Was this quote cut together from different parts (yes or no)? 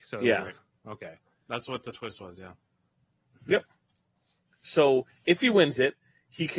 no